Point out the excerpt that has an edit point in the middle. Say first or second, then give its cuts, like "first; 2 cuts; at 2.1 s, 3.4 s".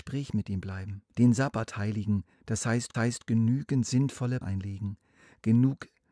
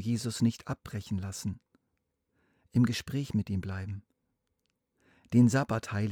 first; 4 cuts; at 1.1 s, 2.3 s, 2.9 s, 4.4 s